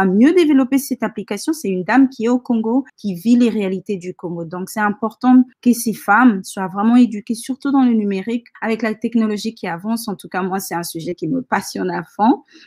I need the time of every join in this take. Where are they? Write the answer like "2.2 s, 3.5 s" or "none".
2.9 s, 5.5 s, 8.5 s